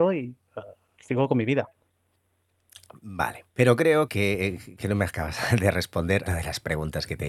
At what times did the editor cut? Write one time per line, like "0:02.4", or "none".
0:03.5
0:04.1
0:06.3